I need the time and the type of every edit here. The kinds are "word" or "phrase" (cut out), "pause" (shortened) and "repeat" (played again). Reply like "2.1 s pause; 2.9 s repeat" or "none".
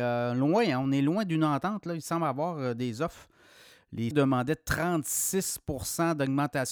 4.1 s word